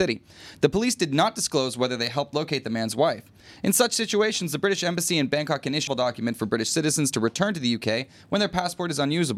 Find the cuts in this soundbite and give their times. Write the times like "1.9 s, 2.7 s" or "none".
5.9 s